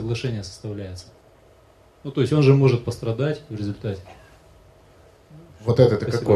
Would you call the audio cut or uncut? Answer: uncut